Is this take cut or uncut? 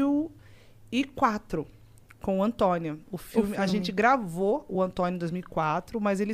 uncut